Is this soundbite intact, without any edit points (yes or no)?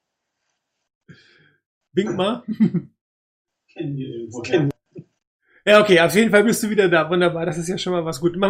yes